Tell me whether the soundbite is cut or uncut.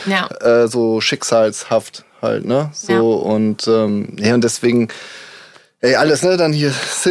uncut